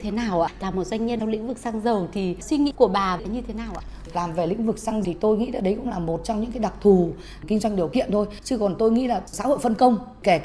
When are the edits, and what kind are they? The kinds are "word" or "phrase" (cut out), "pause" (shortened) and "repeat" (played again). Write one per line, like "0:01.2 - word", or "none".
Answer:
0:05.0 - word